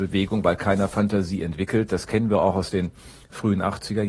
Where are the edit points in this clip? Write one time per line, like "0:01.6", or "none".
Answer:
none